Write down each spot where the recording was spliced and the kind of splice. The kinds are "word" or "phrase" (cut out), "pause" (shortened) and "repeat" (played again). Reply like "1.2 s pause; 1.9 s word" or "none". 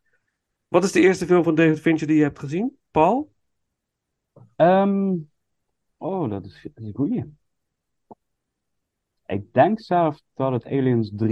5.6 s pause